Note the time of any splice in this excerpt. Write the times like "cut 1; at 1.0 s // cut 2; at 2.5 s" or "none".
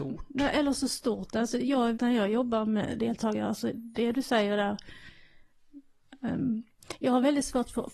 cut 1; at 1.9 s // cut 2; at 3.7 s

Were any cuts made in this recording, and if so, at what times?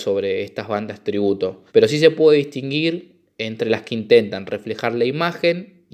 cut 1; at 1.7 s

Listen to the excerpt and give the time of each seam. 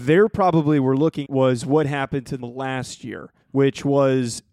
cut 1; at 1.2 s // cut 2; at 2.4 s // cut 3; at 3.4 s

